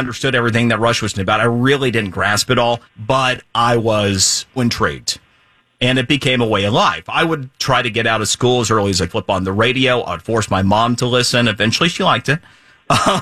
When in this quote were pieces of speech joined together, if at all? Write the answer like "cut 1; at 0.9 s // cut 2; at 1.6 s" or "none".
cut 1; at 1.1 s // cut 2; at 2.9 s // cut 3; at 4.6 s // cut 4; at 9.1 s